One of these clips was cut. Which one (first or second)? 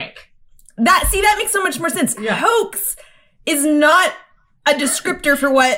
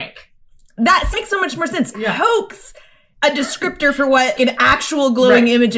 second